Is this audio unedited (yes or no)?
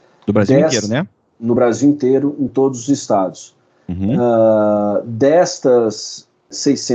yes